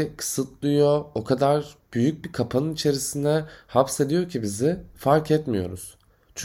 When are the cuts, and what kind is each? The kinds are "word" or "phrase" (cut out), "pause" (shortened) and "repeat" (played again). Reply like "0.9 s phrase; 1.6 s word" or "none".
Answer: none